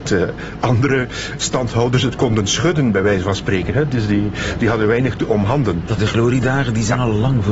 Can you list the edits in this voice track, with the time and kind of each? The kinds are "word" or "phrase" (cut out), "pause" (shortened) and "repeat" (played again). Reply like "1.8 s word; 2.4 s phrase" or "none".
6.0 s word